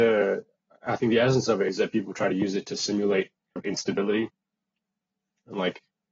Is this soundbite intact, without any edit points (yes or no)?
no